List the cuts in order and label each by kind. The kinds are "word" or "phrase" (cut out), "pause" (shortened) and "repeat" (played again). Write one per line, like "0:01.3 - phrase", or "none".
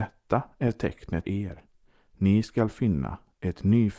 0:01.2 - word